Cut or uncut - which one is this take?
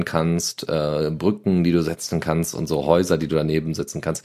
uncut